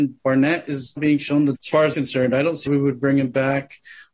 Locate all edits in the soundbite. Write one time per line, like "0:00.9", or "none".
0:01.0
0:01.5
0:01.9
0:02.7